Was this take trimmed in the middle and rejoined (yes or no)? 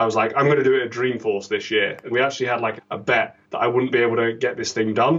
yes